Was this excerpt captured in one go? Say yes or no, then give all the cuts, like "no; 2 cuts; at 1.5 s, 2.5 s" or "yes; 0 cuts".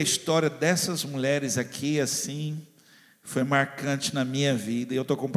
yes; 0 cuts